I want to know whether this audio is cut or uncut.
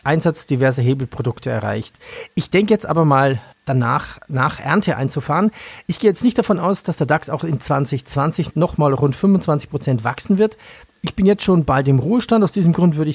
uncut